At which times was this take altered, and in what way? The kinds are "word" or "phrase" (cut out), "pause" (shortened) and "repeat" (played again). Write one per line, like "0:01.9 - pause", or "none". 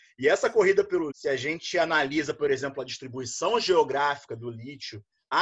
0:01.1 - word